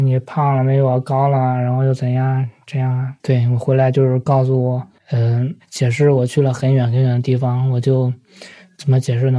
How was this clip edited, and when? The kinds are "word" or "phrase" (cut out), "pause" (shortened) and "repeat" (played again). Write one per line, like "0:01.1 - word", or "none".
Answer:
0:03.2 - pause
0:05.0 - pause